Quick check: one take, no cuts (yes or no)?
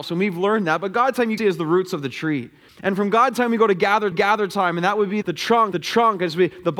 no